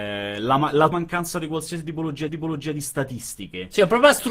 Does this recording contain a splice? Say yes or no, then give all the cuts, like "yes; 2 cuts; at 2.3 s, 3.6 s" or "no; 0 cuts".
yes; 2 cuts; at 0.9 s, 2.3 s